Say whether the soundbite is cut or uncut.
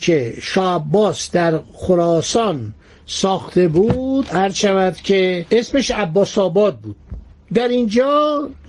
uncut